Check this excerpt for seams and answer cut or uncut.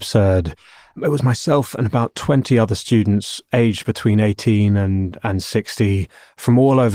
uncut